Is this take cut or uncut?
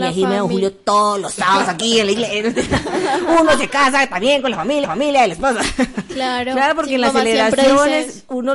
cut